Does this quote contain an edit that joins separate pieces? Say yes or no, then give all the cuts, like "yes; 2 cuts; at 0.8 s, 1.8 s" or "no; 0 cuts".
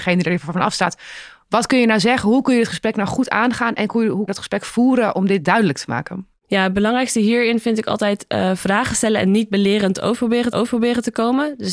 yes; 2 cuts; at 4.3 s, 10.5 s